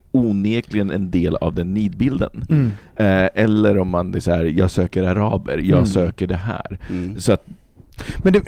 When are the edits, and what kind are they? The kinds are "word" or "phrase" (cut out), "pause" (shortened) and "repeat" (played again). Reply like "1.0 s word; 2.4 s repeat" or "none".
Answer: none